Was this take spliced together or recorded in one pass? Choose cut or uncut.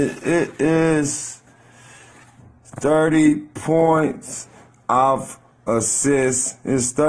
uncut